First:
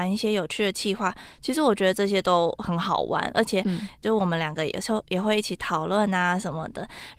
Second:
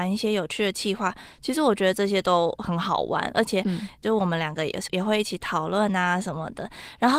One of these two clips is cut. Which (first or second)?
second